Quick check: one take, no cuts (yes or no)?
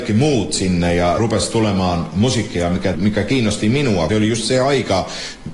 no